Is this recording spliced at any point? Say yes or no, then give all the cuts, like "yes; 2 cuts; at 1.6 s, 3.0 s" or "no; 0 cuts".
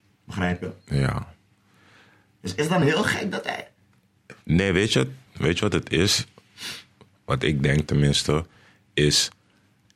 no; 0 cuts